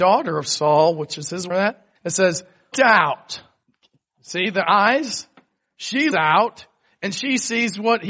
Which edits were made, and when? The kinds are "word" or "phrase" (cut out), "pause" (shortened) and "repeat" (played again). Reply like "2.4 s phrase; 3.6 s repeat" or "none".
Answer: 1.5 s phrase; 2.0 s pause; 2.7 s word; 6.1 s word